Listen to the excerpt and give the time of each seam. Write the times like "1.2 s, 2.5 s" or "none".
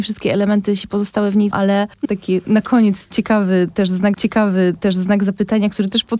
1.5 s, 2.0 s, 2.4 s, 4.1 s